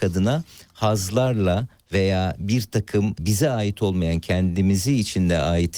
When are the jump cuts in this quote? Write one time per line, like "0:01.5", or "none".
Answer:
0:03.2